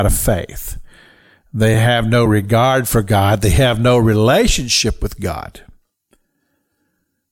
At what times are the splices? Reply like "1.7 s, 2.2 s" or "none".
none